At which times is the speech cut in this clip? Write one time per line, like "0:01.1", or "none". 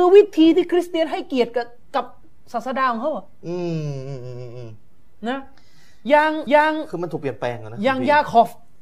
0:06.5